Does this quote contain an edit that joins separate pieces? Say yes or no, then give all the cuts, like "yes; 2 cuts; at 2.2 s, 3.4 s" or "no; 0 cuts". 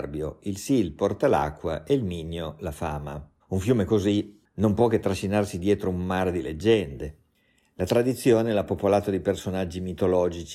yes; 1 cut; at 3.4 s